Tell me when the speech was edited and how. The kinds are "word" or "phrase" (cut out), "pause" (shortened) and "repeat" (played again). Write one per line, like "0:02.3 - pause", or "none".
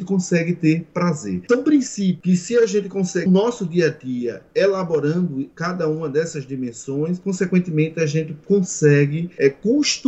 0:03.3 - phrase

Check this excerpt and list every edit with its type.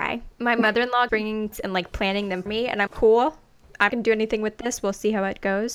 0:01.1 - word
0:01.5 - word
0:02.5 - word
0:02.9 - word
0:03.9 - word

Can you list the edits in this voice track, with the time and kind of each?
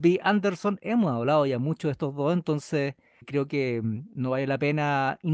none

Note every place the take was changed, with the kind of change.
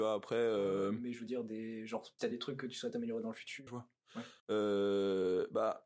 0:02.2 - word
0:03.7 - word
0:04.4 - pause

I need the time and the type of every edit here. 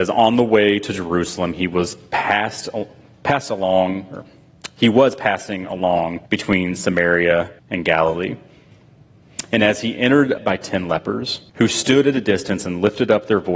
0:06.3 - pause
0:07.6 - pause
0:10.4 - phrase
0:11.5 - pause

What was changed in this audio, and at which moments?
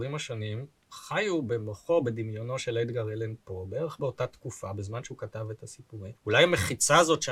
0:06.2 - pause

